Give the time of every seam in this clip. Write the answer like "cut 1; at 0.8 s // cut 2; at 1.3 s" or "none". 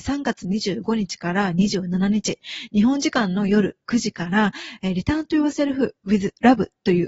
none